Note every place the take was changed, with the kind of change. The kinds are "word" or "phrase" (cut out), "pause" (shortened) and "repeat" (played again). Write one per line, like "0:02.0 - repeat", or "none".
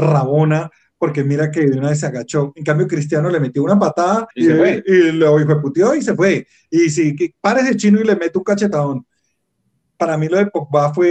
0:04.3 - pause